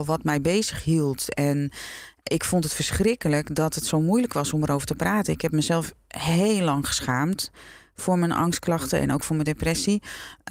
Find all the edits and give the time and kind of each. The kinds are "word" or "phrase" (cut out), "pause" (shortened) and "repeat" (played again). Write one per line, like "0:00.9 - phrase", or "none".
none

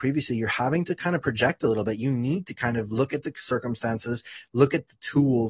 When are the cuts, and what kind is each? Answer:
none

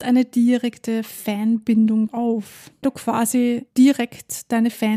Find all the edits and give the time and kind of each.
0:02.1 - word
0:02.8 - word

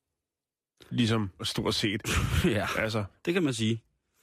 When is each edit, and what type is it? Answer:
0:01.4 - word

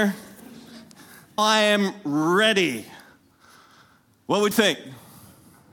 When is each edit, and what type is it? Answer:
0:01.4 - word
0:04.5 - word

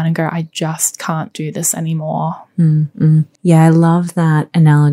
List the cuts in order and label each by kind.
0:03.3 - pause

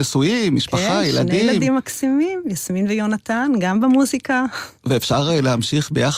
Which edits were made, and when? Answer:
0:04.8 - pause

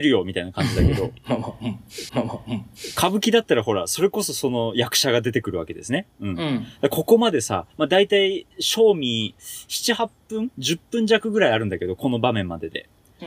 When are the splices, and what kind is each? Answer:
0:02.1 - repeat
0:07.7 - pause
0:08.5 - pause

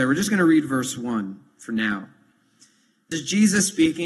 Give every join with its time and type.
0:03.1 - word

